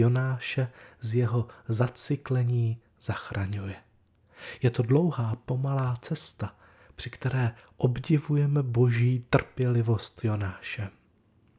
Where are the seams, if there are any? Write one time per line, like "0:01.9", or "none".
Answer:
0:10.2